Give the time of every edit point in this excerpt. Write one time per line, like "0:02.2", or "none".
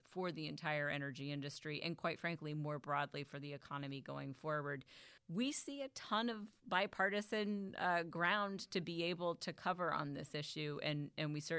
0:05.2